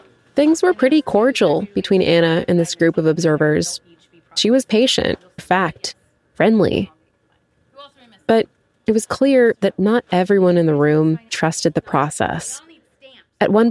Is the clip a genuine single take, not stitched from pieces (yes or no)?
no